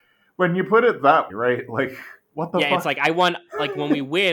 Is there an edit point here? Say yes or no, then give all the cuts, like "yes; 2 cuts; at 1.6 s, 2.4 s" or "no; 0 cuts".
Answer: yes; 1 cut; at 1.3 s